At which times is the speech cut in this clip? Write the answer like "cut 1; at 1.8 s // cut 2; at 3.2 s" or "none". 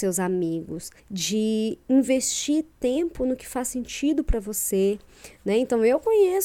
cut 1; at 1.0 s